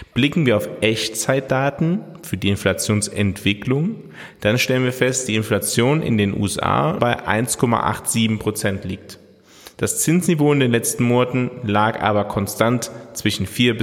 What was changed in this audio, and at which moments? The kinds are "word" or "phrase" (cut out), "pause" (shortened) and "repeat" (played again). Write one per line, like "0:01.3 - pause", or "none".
0:05.3 - word
0:07.0 - word